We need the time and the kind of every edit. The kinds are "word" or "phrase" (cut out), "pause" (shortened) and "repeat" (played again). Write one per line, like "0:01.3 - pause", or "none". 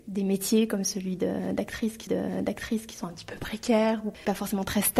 0:02.1 - repeat